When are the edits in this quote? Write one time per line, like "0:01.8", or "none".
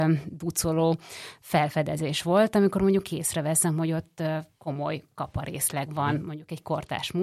0:04.5